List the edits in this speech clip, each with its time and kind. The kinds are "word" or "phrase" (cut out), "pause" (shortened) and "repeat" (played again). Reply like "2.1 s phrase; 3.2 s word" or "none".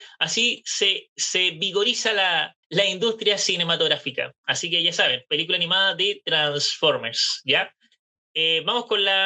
2.6 s pause